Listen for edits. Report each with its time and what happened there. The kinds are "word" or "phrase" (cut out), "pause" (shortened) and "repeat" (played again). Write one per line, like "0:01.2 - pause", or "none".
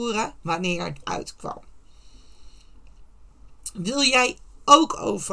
0:01.0 - word